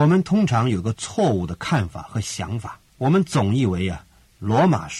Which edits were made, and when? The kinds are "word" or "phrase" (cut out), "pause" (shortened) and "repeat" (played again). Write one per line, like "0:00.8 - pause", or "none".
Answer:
0:02.9 - pause